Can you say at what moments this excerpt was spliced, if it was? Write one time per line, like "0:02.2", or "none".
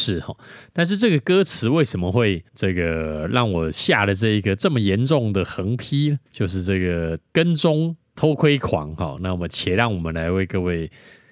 0:02.5
0:07.3

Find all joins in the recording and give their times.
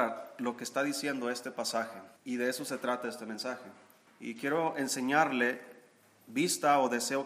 0:02.2
0:04.1

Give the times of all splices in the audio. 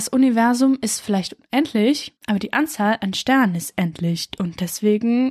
0:02.2

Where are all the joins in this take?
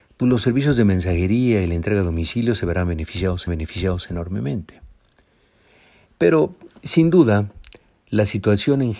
0:03.5

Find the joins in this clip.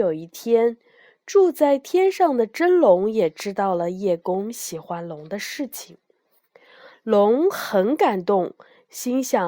none

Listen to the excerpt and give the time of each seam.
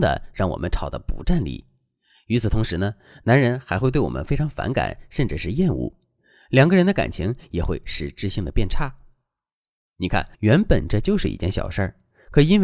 0:10.3

